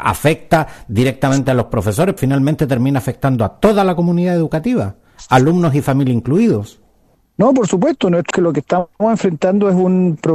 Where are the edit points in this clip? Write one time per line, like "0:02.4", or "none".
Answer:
0:02.2
0:08.3
0:08.9